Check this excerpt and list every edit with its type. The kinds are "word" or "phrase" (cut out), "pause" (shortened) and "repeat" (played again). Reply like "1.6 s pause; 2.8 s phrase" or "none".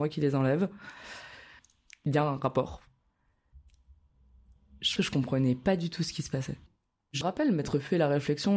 5.0 s word; 7.2 s word